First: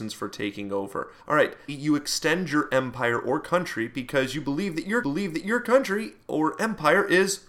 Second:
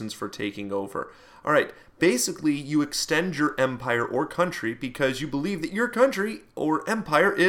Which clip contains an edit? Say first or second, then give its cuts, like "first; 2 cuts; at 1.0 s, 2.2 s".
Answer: first; 3 cuts; at 1.2 s, 1.7 s, 5.0 s